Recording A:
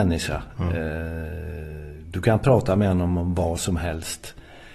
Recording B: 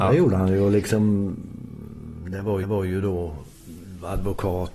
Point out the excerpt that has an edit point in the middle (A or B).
B